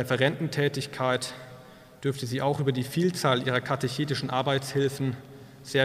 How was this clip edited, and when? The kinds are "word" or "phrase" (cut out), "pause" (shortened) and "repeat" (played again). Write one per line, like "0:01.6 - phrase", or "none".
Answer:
none